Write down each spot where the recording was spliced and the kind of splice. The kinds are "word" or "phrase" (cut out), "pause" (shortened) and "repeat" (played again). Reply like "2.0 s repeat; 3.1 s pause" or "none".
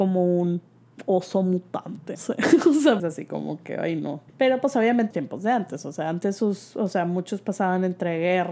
2.1 s word; 3.0 s phrase; 4.3 s pause; 5.1 s phrase